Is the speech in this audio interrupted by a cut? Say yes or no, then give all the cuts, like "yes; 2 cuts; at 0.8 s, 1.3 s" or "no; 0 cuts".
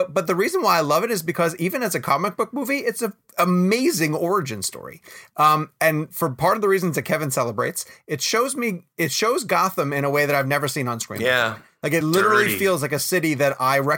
no; 0 cuts